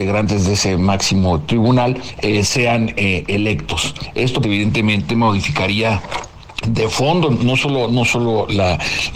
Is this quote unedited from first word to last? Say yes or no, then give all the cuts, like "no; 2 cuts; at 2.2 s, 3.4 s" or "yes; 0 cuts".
no; 1 cut; at 4.4 s